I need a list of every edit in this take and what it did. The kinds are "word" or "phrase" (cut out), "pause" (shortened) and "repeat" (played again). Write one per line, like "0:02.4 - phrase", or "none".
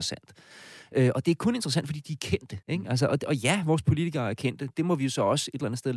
0:02.6 - pause

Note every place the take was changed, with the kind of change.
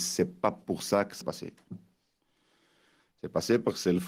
0:01.2 - word

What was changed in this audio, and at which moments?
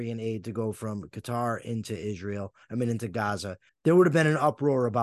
0:03.7 - pause

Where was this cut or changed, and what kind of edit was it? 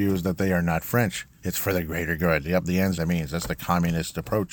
0:03.0 - word

